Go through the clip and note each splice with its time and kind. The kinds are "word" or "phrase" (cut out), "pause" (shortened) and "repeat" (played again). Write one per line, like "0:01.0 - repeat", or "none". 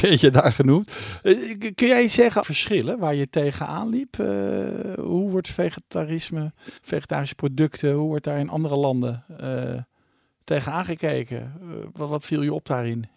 0:02.4 - phrase
0:06.8 - pause